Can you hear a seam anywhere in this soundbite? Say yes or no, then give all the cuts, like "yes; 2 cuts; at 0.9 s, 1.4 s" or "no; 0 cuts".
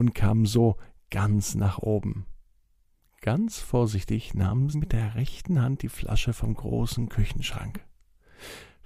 yes; 1 cut; at 4.7 s